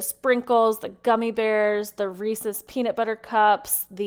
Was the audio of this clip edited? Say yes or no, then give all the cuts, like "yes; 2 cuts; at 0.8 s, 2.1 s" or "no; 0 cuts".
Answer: no; 0 cuts